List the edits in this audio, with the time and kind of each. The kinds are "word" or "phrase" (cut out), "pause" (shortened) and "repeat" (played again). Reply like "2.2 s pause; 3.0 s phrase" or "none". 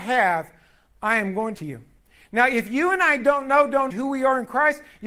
1.5 s phrase; 3.9 s word